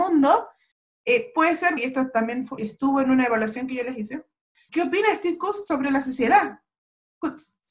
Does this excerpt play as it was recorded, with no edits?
no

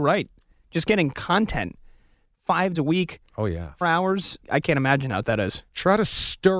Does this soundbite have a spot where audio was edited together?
yes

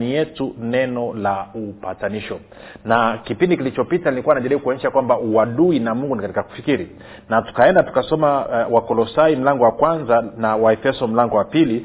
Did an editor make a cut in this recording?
no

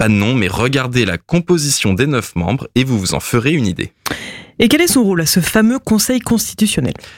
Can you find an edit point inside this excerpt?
no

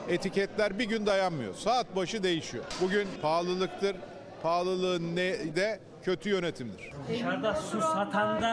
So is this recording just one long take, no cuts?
no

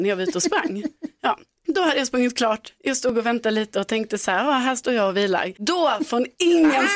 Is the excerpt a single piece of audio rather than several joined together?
no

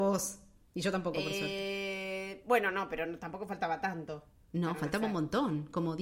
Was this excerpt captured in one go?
yes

